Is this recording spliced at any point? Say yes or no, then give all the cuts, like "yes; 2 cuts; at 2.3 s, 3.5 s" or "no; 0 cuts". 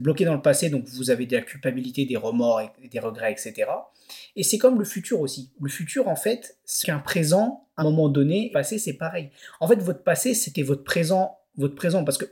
yes; 3 cuts; at 6.8 s, 7.8 s, 8.5 s